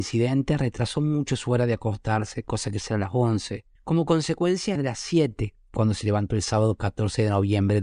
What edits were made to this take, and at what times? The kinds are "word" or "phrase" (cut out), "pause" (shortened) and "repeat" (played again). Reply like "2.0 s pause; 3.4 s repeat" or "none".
2.8 s word; 3.8 s pause; 4.8 s phrase